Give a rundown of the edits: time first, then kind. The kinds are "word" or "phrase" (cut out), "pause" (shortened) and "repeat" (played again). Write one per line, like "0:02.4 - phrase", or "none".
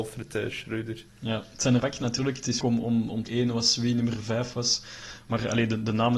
0:01.1 - pause
0:01.8 - word
0:02.6 - word
0:03.3 - phrase